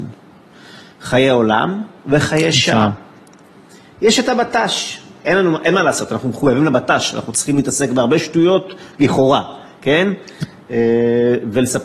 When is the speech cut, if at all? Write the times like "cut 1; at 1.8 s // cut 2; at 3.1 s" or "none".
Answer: none